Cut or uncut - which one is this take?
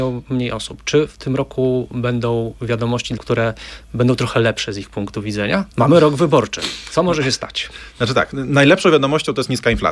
cut